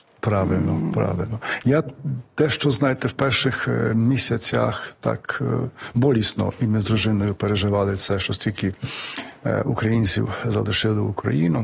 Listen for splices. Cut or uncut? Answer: uncut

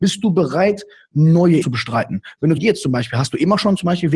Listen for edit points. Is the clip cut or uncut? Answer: cut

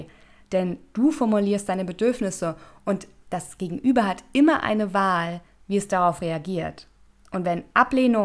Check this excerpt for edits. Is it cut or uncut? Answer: uncut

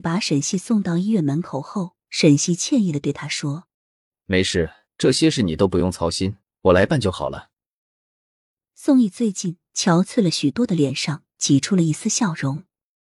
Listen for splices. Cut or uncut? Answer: cut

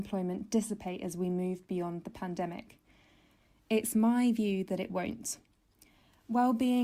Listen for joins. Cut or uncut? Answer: uncut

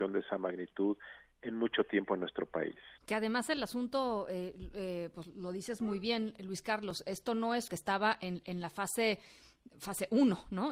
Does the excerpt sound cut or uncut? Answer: cut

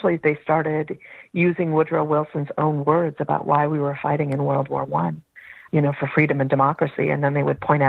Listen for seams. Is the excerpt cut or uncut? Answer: cut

